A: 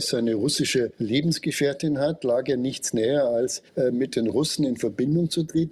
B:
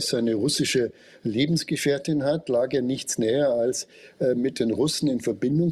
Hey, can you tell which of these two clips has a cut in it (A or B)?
A